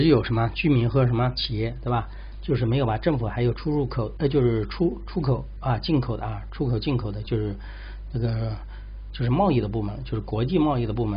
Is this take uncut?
yes; 0 cuts

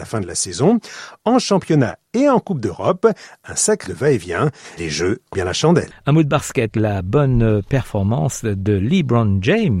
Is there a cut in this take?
yes; 4 cuts; at 3.9 s, 4.8 s, 5.3 s, 6.7 s

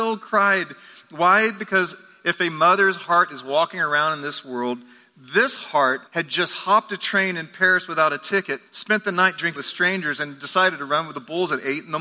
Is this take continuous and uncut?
no; 3 cuts; at 6.1 s, 8.7 s, 9.6 s

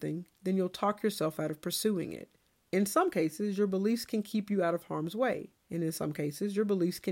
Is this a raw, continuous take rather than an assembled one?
no; 2 cuts; at 2.6 s, 5.6 s

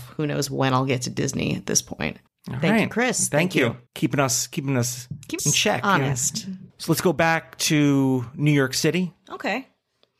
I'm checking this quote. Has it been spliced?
yes; 4 cuts; at 2.3 s, 3.9 s, 5.4 s, 6.7 s

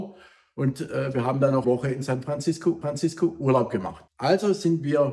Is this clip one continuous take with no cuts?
no; 3 cuts; at 1.6 s, 2.8 s, 4.1 s

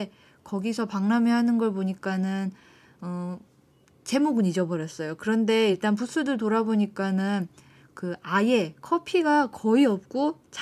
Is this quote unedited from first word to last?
yes; 0 cuts

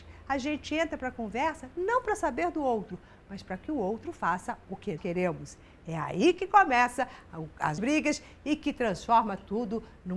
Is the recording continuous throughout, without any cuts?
no; 2 cuts; at 5.0 s, 7.8 s

